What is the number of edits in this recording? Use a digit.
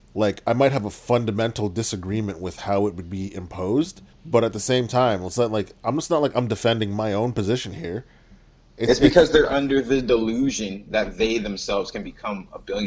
1